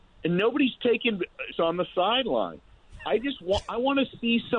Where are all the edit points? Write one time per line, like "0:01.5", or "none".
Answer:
0:01.5